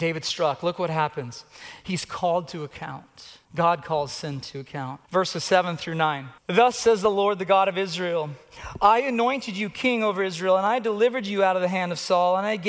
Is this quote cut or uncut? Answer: cut